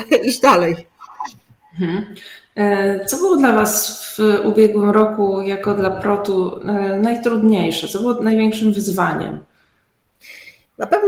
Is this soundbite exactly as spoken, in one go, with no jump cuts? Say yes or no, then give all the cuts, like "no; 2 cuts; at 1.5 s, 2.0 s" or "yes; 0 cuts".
yes; 0 cuts